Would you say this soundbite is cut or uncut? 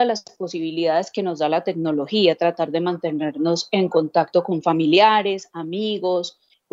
uncut